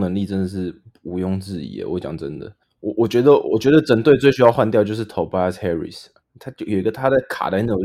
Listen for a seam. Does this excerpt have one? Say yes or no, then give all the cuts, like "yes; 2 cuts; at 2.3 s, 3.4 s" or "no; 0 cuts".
no; 0 cuts